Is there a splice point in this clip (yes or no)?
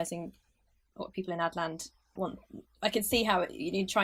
yes